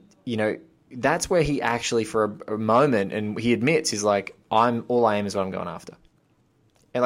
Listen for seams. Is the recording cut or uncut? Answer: uncut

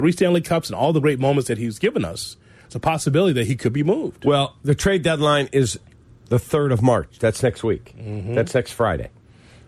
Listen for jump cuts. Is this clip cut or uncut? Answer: uncut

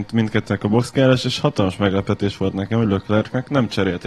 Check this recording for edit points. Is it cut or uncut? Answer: uncut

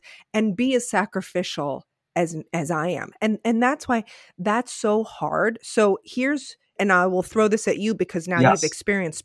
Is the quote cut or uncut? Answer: cut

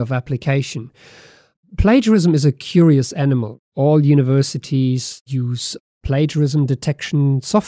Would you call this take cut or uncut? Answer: uncut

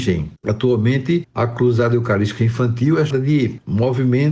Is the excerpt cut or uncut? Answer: cut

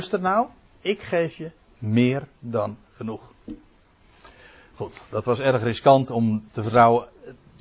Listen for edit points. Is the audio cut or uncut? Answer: uncut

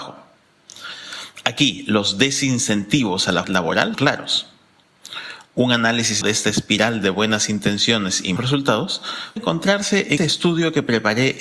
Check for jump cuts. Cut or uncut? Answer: cut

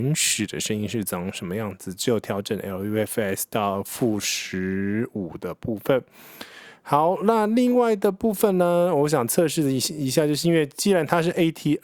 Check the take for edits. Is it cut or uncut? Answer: uncut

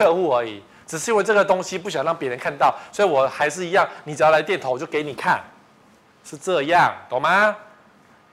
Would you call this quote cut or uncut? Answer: uncut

